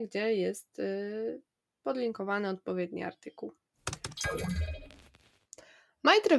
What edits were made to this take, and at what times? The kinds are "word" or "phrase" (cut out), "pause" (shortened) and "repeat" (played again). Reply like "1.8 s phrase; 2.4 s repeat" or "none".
none